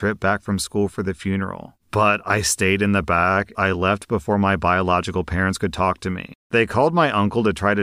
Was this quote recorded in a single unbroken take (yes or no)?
no